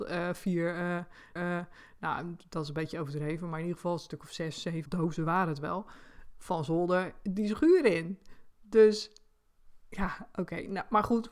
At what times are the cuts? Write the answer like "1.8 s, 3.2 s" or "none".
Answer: 1.4 s, 4.9 s